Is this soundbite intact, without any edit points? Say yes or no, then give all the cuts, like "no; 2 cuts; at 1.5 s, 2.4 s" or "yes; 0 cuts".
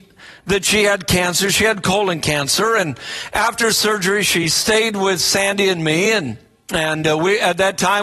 yes; 0 cuts